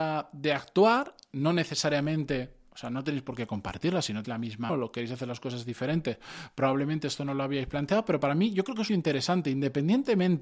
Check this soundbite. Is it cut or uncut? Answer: cut